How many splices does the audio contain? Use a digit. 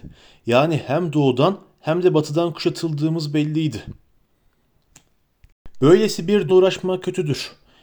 1